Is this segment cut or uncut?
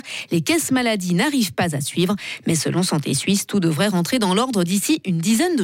uncut